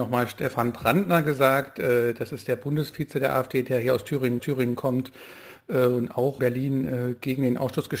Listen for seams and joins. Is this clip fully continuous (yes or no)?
no